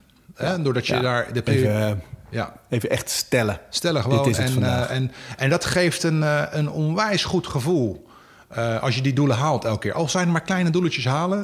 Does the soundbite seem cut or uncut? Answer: uncut